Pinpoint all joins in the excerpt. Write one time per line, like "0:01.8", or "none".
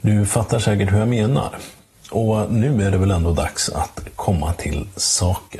none